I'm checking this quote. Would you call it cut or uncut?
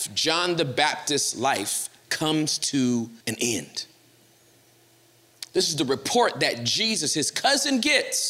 cut